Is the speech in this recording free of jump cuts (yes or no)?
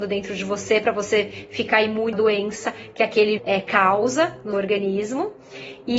no